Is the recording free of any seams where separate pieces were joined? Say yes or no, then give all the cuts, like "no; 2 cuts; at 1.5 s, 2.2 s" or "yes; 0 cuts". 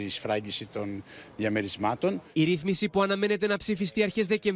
yes; 0 cuts